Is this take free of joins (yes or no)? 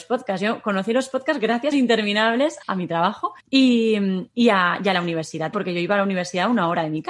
no